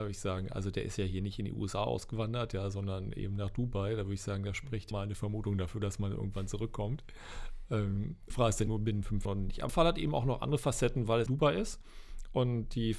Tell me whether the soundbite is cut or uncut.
cut